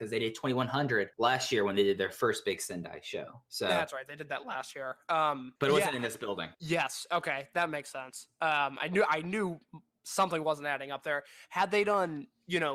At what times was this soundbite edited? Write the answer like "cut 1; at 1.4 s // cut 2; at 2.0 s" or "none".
cut 1; at 1.1 s // cut 2; at 5.6 s // cut 3; at 6.5 s